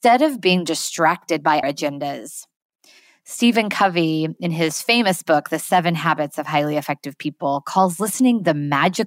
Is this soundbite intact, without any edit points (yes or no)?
no